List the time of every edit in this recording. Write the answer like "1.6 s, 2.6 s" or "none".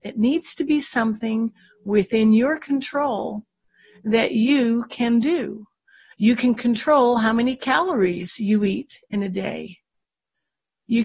none